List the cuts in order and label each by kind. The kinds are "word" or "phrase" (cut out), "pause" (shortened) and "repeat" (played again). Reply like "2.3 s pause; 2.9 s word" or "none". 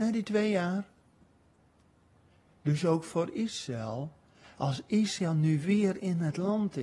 none